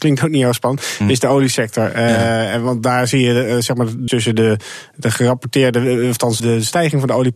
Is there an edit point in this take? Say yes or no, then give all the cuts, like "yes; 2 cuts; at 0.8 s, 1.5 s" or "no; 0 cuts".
yes; 2 cuts; at 4.1 s, 6.4 s